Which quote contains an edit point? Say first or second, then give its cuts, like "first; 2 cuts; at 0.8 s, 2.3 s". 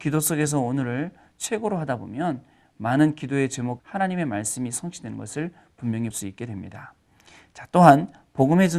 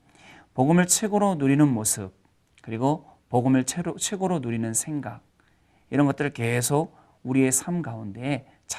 first; 2 cuts; at 3.8 s, 6.1 s